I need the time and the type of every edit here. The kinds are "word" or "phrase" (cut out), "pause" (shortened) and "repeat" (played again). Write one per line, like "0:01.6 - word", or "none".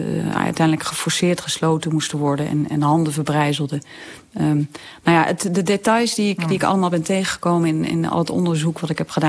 none